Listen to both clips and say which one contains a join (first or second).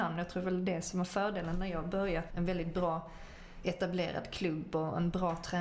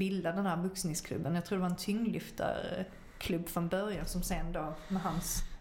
first